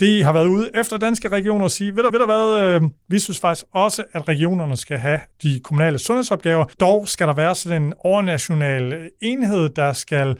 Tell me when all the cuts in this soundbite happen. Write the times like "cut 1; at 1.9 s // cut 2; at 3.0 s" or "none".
cut 1; at 2.1 s // cut 2; at 5.3 s // cut 3; at 6.7 s